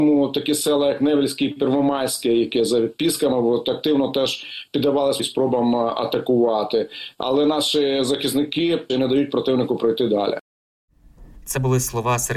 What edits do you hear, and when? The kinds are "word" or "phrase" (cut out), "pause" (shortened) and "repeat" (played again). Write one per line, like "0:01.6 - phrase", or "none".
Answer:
0:05.2 - word
0:08.9 - phrase